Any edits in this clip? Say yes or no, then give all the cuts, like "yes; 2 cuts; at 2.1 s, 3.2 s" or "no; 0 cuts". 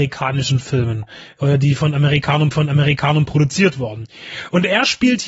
yes; 1 cut; at 2.5 s